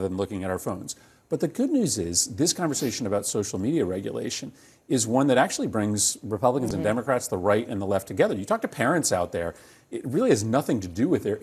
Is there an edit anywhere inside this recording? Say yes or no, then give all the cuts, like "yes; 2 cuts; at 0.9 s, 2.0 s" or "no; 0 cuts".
no; 0 cuts